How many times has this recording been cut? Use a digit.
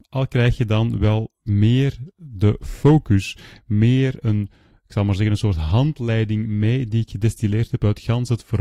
0